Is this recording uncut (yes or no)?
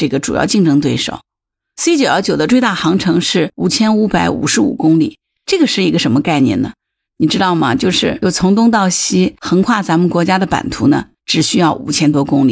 yes